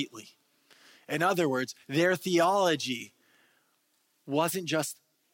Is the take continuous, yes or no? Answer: yes